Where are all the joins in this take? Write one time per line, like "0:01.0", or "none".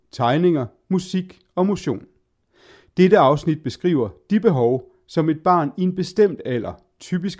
none